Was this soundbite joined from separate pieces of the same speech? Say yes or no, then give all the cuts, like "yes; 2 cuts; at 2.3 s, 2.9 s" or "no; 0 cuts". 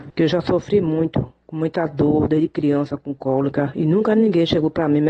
no; 0 cuts